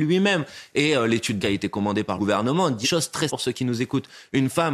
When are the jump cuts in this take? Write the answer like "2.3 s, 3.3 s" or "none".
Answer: 1.4 s, 2.2 s, 2.8 s, 3.3 s

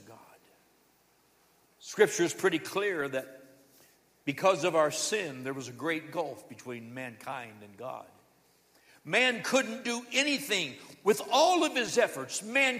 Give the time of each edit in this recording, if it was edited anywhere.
none

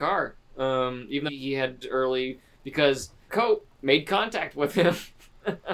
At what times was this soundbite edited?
1.3 s, 1.8 s, 3.3 s

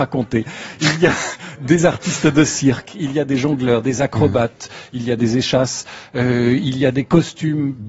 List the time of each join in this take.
none

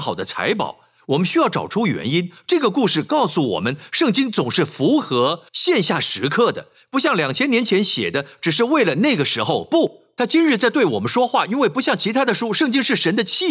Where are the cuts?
5.5 s

